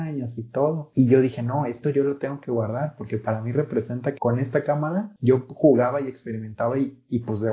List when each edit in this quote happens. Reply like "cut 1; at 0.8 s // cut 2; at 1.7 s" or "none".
cut 1; at 4.2 s